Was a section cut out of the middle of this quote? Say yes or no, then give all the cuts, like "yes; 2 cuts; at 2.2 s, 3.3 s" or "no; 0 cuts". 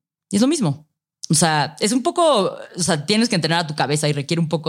no; 0 cuts